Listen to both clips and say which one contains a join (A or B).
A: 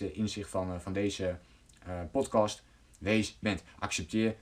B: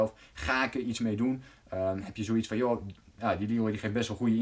A